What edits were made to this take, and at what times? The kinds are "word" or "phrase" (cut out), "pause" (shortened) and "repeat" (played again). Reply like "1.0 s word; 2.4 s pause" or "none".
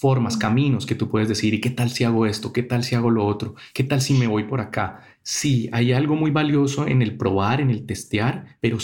none